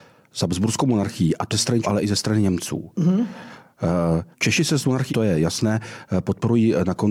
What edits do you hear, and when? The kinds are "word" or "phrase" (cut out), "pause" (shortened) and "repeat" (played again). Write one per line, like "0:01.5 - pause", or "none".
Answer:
0:01.5 - word
0:01.8 - word
0:04.3 - pause
0:05.1 - word